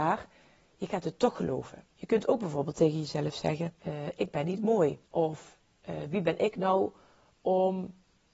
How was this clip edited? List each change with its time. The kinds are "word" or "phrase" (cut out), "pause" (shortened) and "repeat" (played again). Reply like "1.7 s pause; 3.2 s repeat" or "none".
1.9 s pause; 3.8 s pause; 5.1 s pause